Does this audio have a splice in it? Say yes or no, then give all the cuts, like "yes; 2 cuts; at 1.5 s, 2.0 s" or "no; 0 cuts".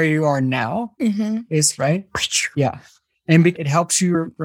yes; 2 cuts; at 1.7 s, 3.5 s